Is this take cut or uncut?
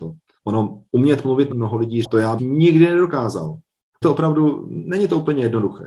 cut